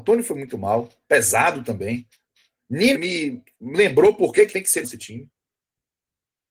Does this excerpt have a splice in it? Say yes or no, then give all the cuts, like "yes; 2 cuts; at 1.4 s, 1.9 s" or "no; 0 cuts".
yes; 3 cuts; at 2.9 s, 4.5 s, 4.8 s